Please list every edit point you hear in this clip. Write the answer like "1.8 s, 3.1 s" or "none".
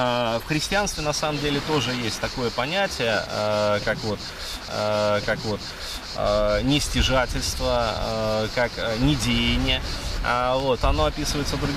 4.7 s, 10.8 s